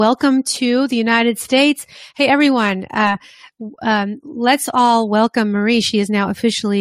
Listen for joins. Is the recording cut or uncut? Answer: uncut